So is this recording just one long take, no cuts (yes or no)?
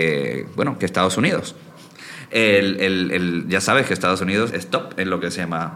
no